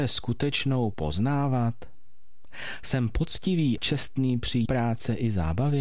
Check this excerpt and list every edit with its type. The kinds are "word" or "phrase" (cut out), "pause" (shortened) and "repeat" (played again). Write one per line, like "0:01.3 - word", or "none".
0:00.9 - word
0:03.8 - word
0:04.7 - word